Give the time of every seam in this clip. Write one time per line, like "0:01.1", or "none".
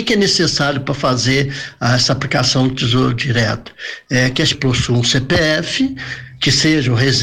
0:04.5